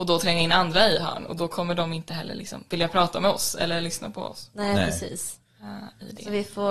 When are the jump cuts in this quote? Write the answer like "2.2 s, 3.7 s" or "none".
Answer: none